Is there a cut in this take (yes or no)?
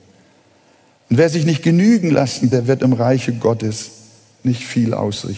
yes